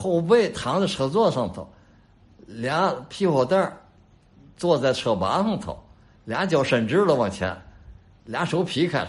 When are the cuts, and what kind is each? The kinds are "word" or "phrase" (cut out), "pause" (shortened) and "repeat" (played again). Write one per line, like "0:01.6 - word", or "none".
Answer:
none